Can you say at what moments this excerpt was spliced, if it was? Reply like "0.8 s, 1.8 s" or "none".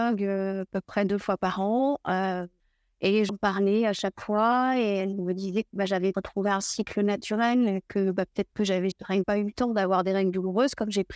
2.6 s, 3.3 s, 6.1 s, 8.9 s, 9.2 s

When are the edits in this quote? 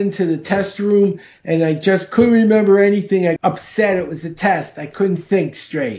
3.4 s

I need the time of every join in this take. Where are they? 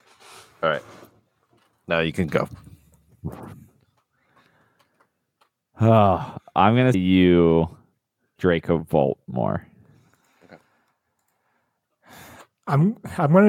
6.9 s, 8.4 s

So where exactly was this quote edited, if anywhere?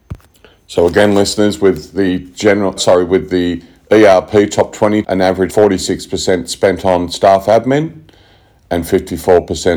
2.8 s, 5.0 s, 5.5 s

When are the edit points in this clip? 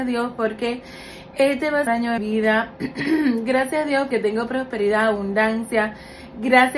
1.9 s, 2.2 s, 4.1 s

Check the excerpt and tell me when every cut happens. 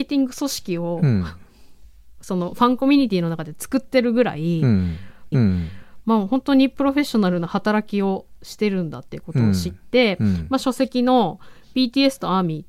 5.3 s

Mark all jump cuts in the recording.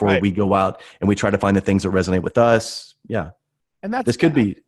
none

